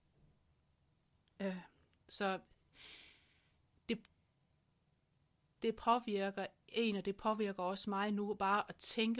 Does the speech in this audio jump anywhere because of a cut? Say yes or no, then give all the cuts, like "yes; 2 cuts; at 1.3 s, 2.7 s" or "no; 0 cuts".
no; 0 cuts